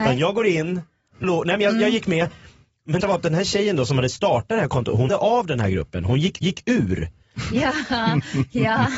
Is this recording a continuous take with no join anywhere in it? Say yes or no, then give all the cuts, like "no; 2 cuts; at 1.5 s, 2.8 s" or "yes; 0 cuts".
no; 4 cuts; at 1.2 s, 3.0 s, 5.1 s, 6.4 s